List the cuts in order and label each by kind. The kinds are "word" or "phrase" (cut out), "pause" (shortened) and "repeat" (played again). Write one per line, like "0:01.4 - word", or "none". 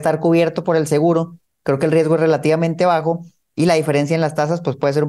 none